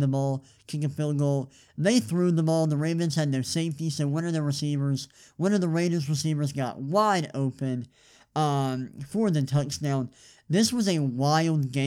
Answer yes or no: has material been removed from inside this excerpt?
no